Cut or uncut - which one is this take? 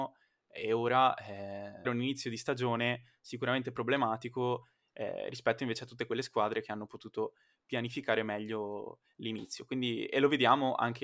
cut